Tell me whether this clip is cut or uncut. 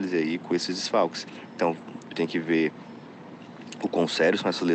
cut